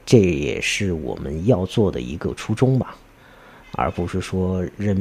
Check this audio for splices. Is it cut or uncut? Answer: uncut